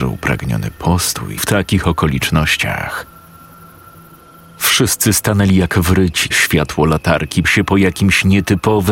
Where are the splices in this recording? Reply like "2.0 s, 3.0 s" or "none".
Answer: 1.4 s, 6.3 s, 7.4 s